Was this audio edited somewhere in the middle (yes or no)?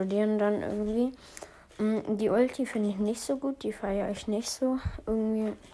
no